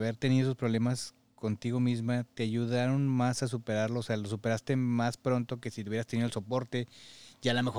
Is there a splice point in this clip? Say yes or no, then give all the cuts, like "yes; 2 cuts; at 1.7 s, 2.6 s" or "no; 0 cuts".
no; 0 cuts